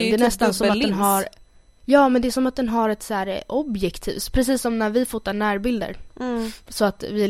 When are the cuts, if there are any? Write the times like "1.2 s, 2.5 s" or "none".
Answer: none